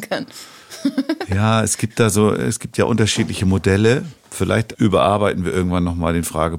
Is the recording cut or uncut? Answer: cut